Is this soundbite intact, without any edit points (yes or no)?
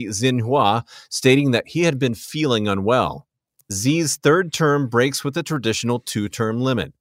yes